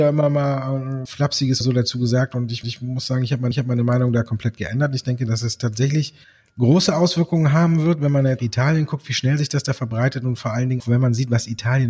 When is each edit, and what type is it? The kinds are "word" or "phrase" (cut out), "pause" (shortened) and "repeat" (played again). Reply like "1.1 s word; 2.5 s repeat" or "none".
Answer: 1.1 s word; 1.6 s word; 2.6 s repeat; 3.5 s repeat; 6.2 s pause; 8.4 s phrase; 10.8 s word

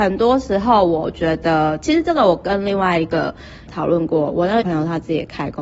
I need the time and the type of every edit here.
3.7 s word; 4.6 s word

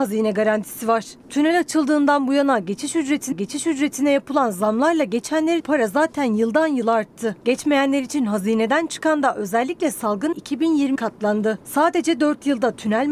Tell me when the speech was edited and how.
3.3 s repeat; 5.6 s word; 10.3 s word; 11.0 s word

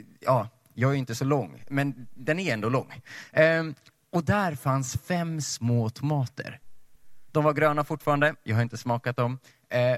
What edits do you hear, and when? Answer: none

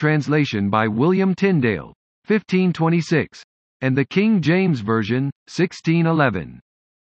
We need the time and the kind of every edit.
none

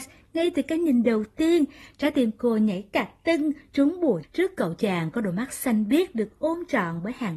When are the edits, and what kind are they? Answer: 4.2 s word

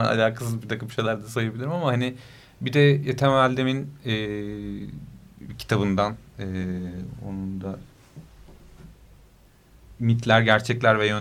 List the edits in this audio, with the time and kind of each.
none

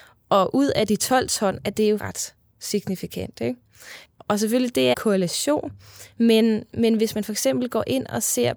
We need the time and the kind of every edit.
2.0 s word; 4.9 s word

